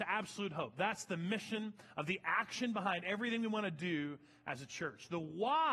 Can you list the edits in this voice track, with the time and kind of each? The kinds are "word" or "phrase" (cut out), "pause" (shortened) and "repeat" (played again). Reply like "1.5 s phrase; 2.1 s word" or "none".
none